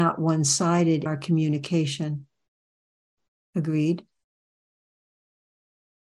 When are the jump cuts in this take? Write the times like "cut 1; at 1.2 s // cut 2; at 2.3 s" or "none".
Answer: cut 1; at 1.1 s